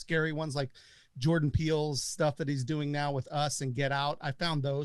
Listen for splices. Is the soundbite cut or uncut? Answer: uncut